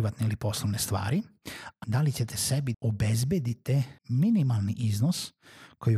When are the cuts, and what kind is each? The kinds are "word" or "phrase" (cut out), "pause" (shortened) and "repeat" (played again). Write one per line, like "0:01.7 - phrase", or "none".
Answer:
0:01.8 - phrase
0:02.7 - word
0:04.0 - pause